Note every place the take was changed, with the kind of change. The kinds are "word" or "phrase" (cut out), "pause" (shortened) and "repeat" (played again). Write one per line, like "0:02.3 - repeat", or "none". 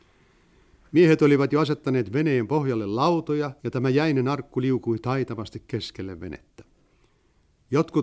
0:03.6 - pause